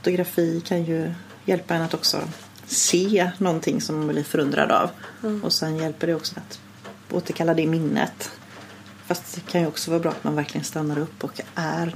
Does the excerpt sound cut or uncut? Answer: cut